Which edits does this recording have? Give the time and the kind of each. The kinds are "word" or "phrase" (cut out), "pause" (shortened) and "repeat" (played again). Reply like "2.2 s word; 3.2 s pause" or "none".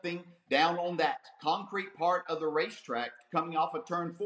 none